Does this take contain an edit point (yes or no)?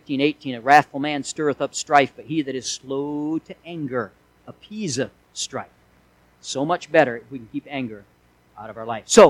no